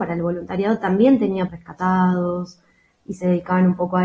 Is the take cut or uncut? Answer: cut